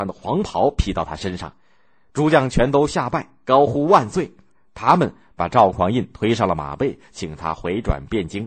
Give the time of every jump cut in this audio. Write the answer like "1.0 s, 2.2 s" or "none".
none